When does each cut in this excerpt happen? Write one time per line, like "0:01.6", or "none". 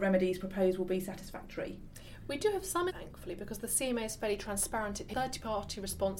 0:02.9
0:05.1